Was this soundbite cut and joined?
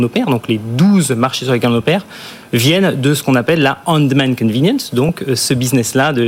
no; 0 cuts

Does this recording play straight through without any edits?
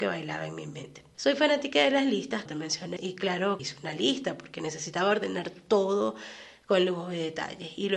no; 3 cuts; at 2.5 s, 3.0 s, 3.6 s

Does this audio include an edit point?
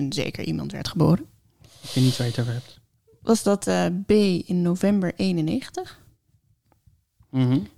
no; 0 cuts

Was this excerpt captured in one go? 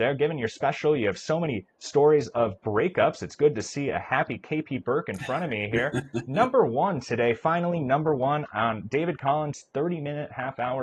yes; 0 cuts

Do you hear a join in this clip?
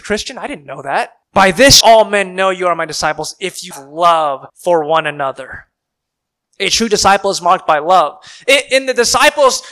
yes; 4 cuts; at 1.2 s, 1.8 s, 3.7 s, 4.5 s

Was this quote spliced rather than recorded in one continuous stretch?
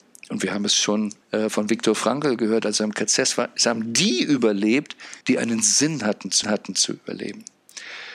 yes; 3 cuts; at 1.2 s, 5.2 s, 6.4 s

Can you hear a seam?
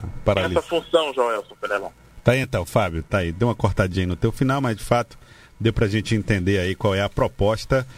no; 0 cuts

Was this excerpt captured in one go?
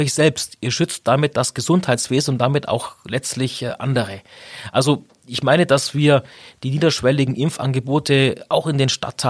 yes; 0 cuts

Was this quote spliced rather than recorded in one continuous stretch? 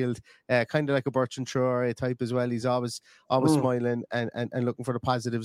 no; 0 cuts

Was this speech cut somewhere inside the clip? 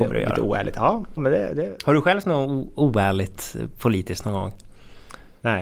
yes; 2 cuts; at 1.2 s, 2.2 s

